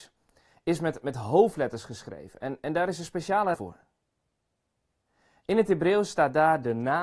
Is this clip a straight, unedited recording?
no; 1 cut; at 3.5 s

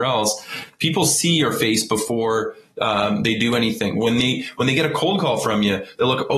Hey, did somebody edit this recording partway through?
no; 0 cuts

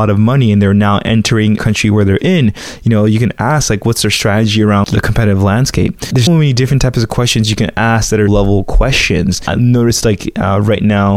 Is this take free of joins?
no; 4 cuts; at 1.6 s, 4.8 s, 6.3 s, 8.3 s

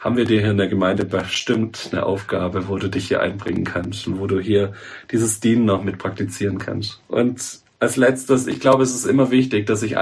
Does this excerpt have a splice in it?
yes; 1 cut; at 7.0 s

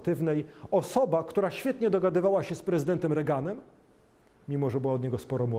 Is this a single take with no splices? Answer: yes; 0 cuts

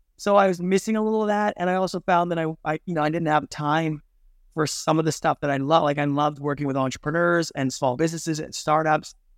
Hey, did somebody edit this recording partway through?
no; 0 cuts

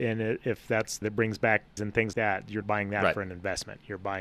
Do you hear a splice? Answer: yes; 4 cuts; at 1.0 s, 1.8 s, 2.1 s, 2.6 s

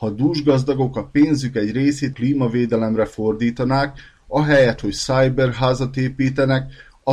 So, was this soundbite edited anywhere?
yes; 1 cut; at 2.1 s

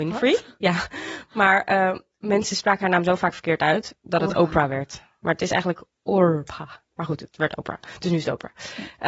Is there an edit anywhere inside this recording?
no; 0 cuts

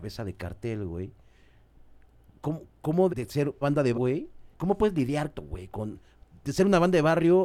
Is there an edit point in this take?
yes; 6 cuts; at 2.7 s, 3.1 s, 3.6 s, 3.9 s, 4.5 s, 5.3 s

